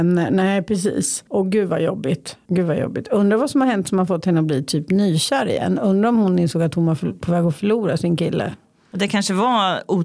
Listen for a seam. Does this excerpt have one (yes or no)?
no